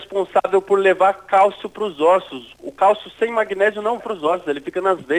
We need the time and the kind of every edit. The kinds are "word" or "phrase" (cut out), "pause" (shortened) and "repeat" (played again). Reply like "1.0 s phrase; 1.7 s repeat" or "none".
4.0 s word